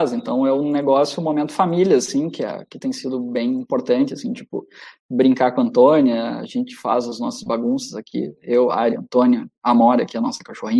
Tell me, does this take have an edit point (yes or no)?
no